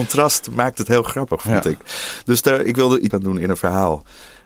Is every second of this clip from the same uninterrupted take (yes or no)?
no